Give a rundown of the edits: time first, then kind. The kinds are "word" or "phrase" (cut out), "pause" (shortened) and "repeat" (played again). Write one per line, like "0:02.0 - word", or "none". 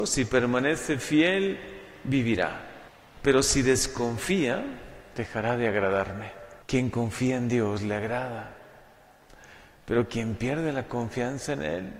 0:02.9 - pause
0:06.6 - pause